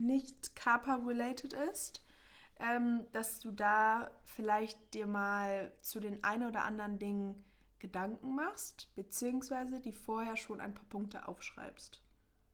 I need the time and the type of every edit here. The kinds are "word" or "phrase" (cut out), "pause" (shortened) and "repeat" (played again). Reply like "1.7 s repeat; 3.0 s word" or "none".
none